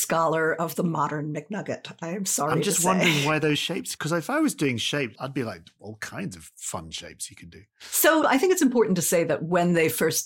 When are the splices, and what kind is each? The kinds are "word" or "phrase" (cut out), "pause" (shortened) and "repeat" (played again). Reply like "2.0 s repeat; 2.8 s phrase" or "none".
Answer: none